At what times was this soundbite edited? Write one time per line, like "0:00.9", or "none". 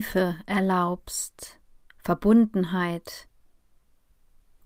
none